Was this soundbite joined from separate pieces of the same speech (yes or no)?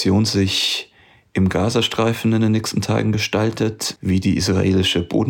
no